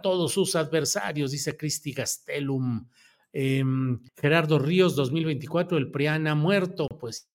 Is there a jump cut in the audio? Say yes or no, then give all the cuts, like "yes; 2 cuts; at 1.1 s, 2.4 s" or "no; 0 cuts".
yes; 1 cut; at 4.1 s